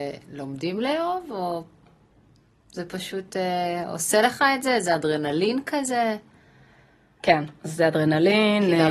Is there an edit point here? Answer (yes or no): no